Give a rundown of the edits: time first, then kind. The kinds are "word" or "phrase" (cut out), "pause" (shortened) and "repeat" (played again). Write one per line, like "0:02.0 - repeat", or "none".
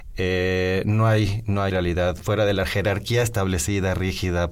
0:01.7 - word